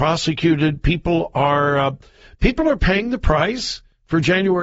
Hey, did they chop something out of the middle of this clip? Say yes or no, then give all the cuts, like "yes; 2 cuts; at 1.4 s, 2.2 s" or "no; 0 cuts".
no; 0 cuts